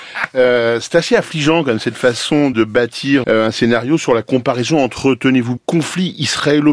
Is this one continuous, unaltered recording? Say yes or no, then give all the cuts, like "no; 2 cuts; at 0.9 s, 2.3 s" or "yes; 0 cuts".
no; 3 cuts; at 2.5 s, 3.2 s, 5.6 s